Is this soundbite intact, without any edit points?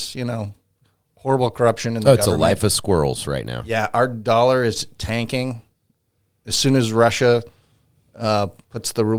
yes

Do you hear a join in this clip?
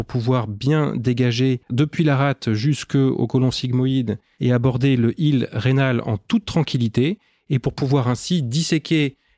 yes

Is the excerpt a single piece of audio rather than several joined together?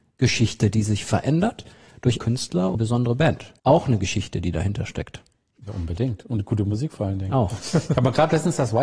no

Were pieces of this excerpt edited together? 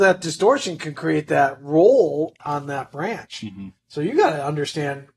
yes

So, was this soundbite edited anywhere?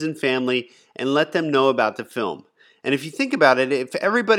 no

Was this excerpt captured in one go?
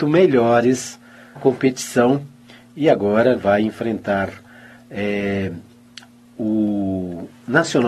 no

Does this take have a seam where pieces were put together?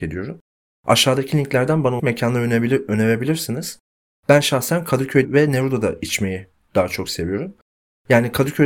yes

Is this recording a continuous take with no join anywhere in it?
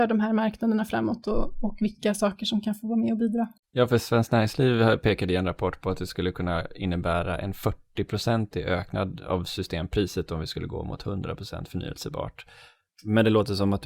yes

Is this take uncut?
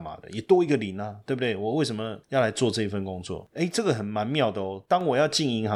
yes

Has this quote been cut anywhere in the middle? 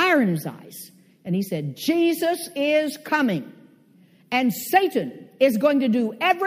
no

